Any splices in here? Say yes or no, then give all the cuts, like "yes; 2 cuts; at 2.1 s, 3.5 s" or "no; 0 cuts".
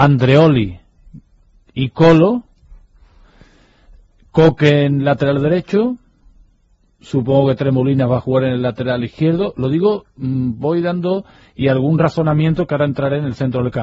no; 0 cuts